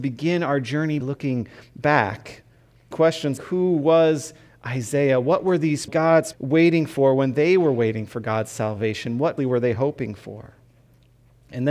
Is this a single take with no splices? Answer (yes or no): no